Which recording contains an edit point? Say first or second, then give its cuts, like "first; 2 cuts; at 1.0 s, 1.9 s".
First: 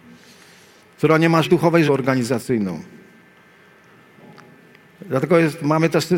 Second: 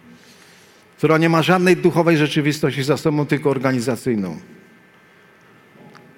first; 2 cuts; at 1.4 s, 1.9 s